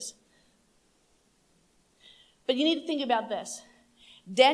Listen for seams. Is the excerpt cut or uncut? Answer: uncut